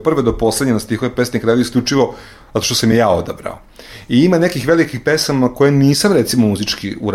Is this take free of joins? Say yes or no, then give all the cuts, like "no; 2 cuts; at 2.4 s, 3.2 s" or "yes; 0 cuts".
yes; 0 cuts